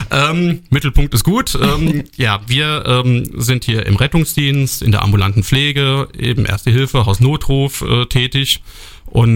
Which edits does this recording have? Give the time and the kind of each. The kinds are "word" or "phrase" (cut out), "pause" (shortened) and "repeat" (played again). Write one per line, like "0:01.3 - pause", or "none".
none